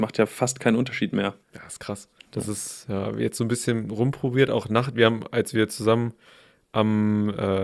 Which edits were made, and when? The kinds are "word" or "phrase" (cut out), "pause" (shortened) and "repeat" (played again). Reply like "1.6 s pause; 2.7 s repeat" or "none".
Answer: 1.4 s pause; 2.2 s pause